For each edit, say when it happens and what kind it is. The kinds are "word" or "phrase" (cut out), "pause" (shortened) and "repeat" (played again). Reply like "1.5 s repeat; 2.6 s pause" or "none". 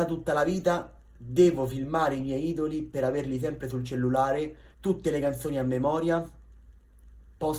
4.7 s pause